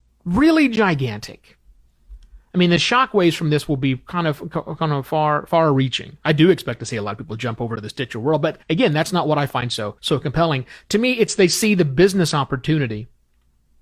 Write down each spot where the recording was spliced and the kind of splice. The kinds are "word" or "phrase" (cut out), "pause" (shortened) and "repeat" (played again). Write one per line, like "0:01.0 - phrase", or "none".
0:08.6 - pause
0:10.0 - pause